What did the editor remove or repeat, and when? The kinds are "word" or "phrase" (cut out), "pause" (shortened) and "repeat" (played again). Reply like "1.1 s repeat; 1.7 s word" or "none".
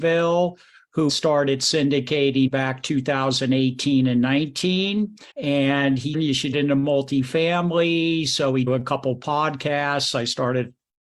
1.1 s word; 2.5 s word; 5.3 s pause; 6.1 s phrase; 6.5 s word; 8.7 s phrase